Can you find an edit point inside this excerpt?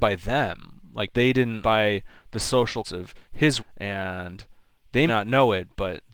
yes; 5 cuts; at 1.1 s, 1.6 s, 2.8 s, 3.6 s, 5.1 s

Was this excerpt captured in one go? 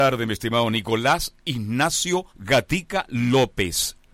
no; 1 cut; at 2.3 s

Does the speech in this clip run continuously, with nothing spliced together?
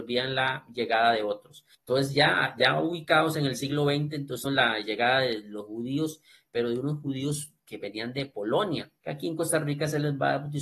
no; 3 cuts; at 1.7 s, 4.4 s, 9.0 s

